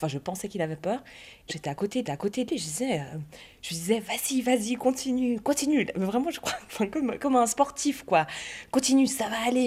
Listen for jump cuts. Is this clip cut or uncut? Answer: cut